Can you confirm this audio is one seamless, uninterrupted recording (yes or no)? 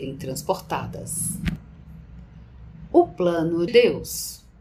no